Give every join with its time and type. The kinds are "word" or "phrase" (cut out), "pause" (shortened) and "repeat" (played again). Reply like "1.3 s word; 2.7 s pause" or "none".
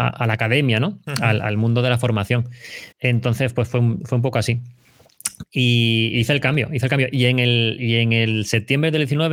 2.9 s pause